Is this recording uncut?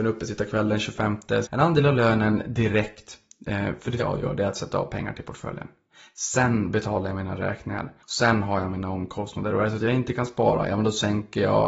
no; 3 cuts; at 1.4 s, 4.0 s, 8.0 s

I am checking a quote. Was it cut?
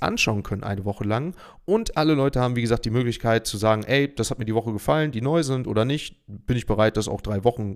no; 0 cuts

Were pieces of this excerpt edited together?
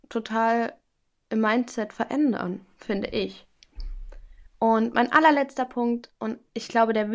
no; 0 cuts

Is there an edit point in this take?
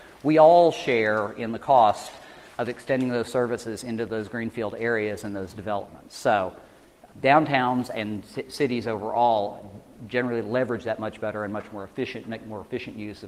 yes; 1 cut; at 7.1 s

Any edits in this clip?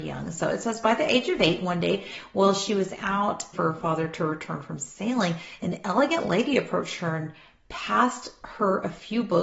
yes; 1 cut; at 3.5 s

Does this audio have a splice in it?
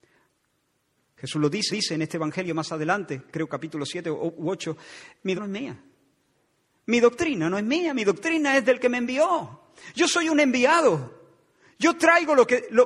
yes; 2 cuts; at 1.7 s, 5.4 s

